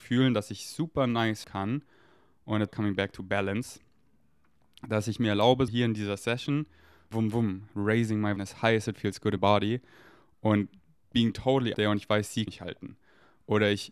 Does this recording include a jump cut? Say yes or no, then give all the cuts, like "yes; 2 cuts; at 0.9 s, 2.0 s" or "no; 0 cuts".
yes; 8 cuts; at 1.4 s, 2.7 s, 5.7 s, 7.1 s, 8.4 s, 9.4 s, 11.7 s, 12.5 s